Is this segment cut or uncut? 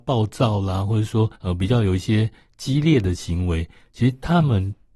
cut